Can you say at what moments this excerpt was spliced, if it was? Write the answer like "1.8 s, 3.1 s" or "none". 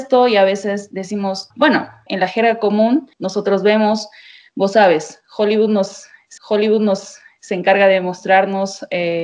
1.5 s, 2.1 s, 3.1 s, 6.4 s